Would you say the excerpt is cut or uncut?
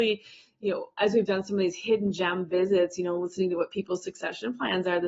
uncut